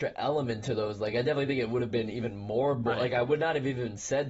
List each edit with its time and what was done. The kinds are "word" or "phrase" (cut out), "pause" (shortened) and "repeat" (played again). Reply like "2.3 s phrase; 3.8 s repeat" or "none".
none